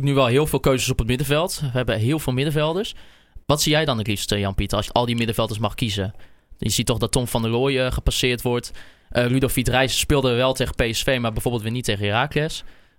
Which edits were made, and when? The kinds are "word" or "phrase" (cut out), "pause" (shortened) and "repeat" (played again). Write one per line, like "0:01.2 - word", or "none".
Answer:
0:03.4 - pause
0:04.9 - word